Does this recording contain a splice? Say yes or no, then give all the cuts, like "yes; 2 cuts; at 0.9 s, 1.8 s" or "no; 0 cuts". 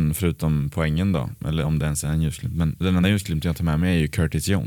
no; 0 cuts